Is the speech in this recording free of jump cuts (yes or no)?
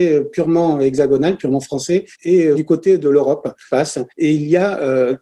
no